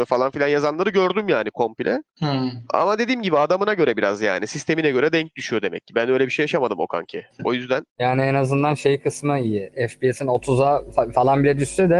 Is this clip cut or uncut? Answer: cut